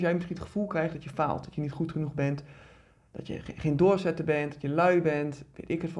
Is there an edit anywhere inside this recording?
no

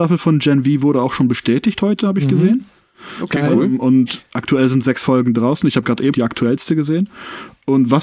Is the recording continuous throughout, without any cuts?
no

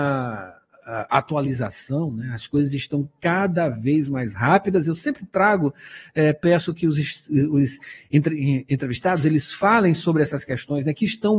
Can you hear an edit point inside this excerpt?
no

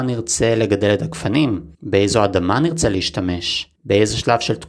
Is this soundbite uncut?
no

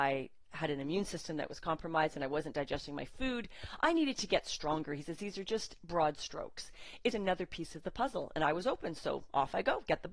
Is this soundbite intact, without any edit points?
no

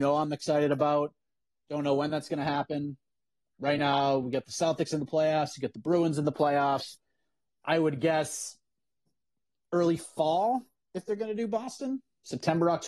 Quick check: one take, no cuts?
yes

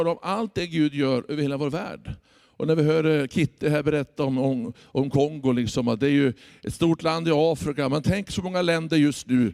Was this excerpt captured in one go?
yes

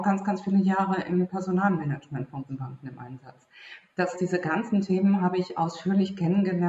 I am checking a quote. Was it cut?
yes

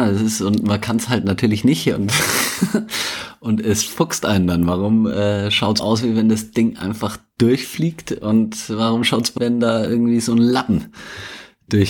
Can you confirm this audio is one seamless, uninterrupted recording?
no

